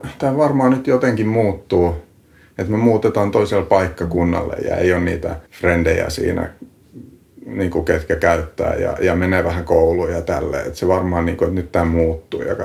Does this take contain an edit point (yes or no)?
yes